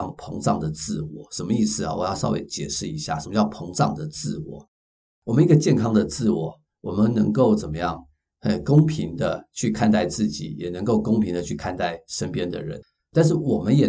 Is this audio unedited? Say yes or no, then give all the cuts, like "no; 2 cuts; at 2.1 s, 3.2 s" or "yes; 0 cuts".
yes; 0 cuts